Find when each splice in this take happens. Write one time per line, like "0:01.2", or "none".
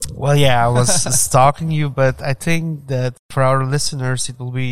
none